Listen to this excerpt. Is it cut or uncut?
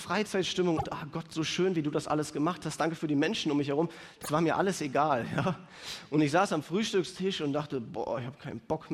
uncut